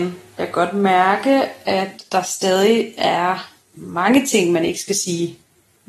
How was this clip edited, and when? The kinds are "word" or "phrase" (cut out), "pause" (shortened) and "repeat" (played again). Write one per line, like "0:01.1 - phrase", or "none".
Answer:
none